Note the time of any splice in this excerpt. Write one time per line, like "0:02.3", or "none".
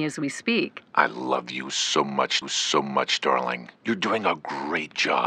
0:02.4